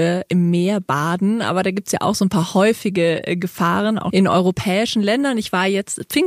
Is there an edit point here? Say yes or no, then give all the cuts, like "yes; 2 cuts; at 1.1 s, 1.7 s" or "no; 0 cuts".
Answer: yes; 1 cut; at 4.1 s